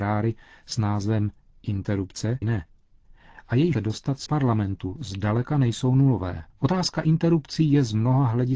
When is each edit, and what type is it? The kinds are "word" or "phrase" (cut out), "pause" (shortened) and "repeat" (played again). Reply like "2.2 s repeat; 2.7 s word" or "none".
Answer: 2.4 s word; 3.7 s word; 4.3 s word; 6.5 s pause